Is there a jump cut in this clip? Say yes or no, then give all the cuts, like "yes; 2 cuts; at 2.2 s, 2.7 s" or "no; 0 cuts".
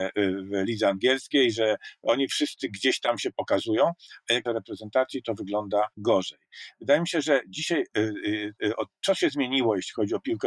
yes; 2 cuts; at 4.5 s, 5.9 s